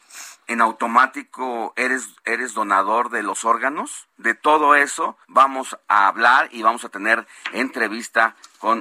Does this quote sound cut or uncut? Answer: cut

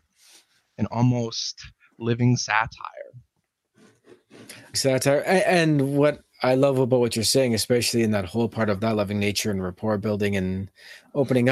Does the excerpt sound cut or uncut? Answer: cut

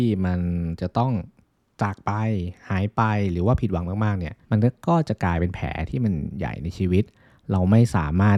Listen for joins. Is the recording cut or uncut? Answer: cut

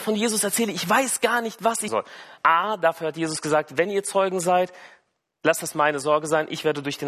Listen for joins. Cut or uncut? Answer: cut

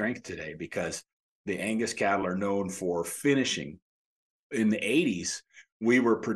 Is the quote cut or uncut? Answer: uncut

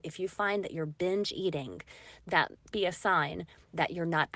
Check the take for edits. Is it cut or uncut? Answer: cut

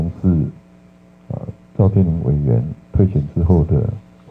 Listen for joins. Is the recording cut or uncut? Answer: cut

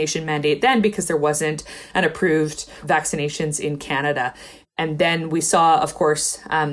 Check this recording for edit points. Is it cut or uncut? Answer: uncut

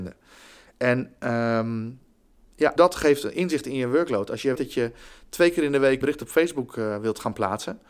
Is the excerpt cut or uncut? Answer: cut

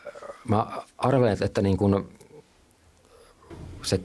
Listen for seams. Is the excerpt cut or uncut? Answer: uncut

